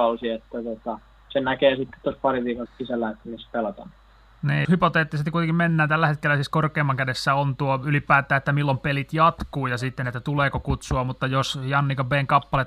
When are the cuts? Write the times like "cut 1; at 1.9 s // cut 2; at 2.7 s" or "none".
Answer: cut 1; at 2.7 s // cut 2; at 4.6 s